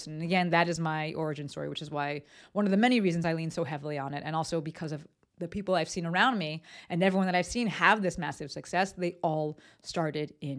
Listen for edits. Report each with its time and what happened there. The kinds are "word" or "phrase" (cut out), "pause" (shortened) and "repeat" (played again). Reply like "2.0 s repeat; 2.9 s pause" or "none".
none